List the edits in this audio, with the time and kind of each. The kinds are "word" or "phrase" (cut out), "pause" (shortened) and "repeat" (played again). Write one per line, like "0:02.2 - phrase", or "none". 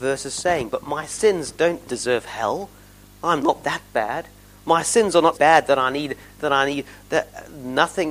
0:01.8 - word
0:05.3 - word
0:06.4 - word

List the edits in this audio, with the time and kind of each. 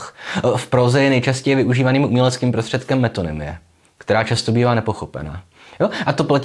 none

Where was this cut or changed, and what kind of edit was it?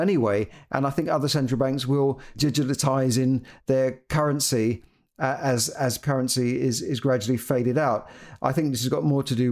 0:02.4 - word
0:03.6 - word
0:06.0 - word

